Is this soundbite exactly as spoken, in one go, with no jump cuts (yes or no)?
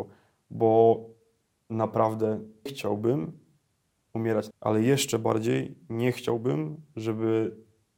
no